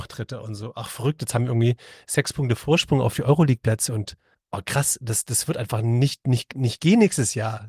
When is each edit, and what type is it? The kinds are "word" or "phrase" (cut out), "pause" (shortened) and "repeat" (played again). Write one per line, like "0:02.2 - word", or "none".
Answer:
0:04.3 - pause